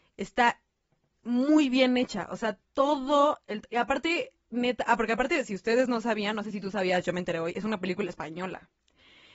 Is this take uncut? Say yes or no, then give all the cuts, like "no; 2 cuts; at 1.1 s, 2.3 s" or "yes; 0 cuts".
yes; 0 cuts